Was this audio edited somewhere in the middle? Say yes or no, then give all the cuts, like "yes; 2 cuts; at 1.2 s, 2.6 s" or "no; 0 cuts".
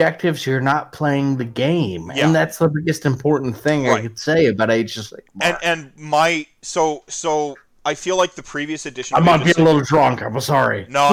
no; 0 cuts